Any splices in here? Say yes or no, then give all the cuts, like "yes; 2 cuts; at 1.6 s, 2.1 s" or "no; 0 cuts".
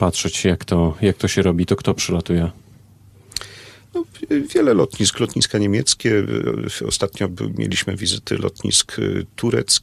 no; 0 cuts